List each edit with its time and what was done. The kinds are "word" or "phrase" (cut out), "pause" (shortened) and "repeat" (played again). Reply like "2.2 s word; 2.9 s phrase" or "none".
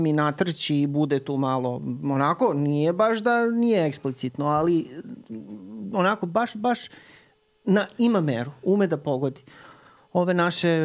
none